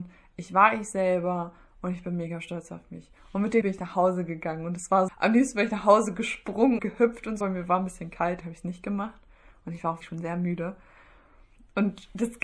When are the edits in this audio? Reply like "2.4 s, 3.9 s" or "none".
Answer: 3.6 s, 5.1 s, 6.8 s, 7.4 s, 8.4 s, 10.0 s

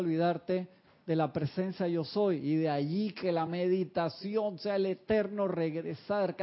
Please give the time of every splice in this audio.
none

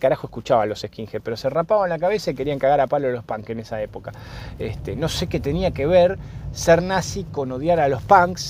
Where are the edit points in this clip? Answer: none

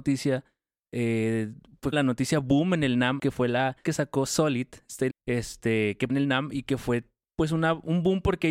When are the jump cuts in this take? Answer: 1.9 s, 3.2 s, 3.8 s, 5.1 s, 6.1 s

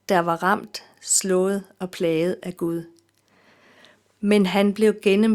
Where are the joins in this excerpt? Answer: none

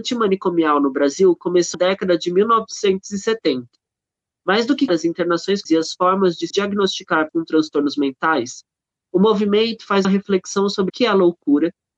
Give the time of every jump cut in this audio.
1.7 s, 4.9 s, 5.7 s, 6.5 s, 7.3 s, 10.0 s, 10.9 s

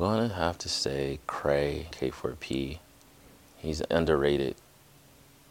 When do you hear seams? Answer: 1.9 s, 3.9 s

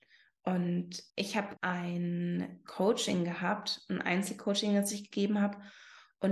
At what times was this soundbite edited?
1.1 s, 1.6 s

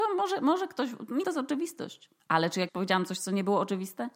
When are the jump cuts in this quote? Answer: 1.2 s, 2.2 s, 2.7 s

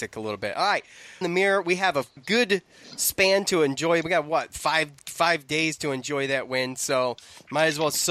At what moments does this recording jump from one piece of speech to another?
1.2 s, 2.2 s

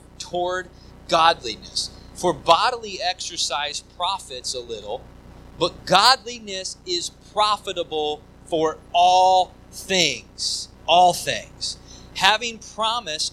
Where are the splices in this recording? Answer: 10.8 s

